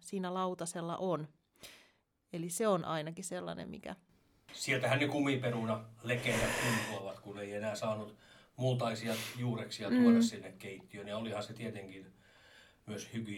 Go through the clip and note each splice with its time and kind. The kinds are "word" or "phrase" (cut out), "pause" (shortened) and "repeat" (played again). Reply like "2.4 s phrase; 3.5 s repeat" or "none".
none

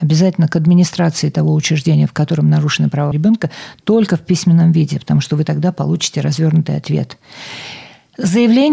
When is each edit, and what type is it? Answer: 3.1 s word

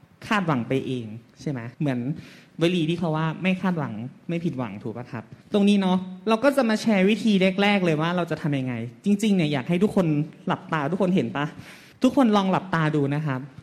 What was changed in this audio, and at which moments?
1.7 s pause; 5.4 s pause; 11.9 s pause

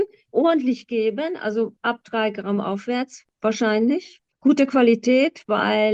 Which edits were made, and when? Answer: none

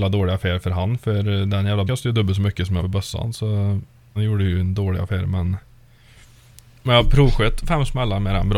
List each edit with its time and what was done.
1.9 s word; 2.8 s word; 4.2 s word

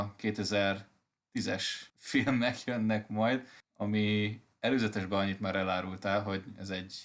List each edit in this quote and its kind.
1.9 s pause; 3.6 s pause

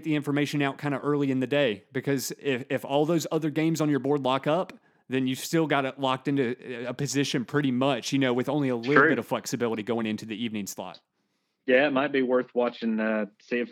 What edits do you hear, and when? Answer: none

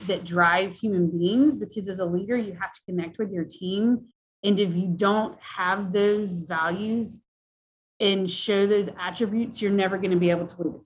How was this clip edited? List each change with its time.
none

